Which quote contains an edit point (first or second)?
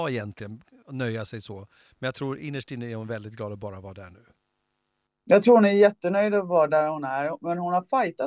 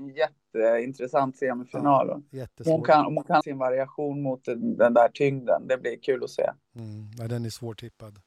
second